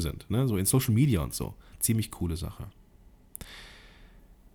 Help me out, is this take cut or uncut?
uncut